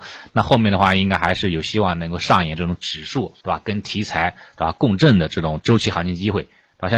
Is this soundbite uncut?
no; 1 cut; at 3.4 s

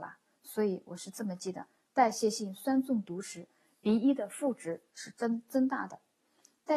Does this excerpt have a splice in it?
no; 0 cuts

